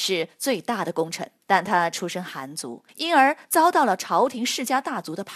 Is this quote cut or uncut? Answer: cut